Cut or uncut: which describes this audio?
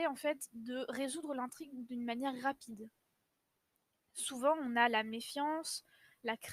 uncut